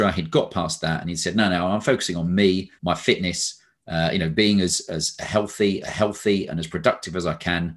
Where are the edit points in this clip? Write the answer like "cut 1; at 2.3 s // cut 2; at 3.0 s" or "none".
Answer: cut 1; at 2.8 s // cut 2; at 5.8 s